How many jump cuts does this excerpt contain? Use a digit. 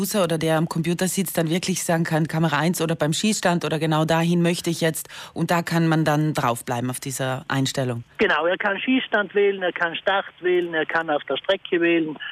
1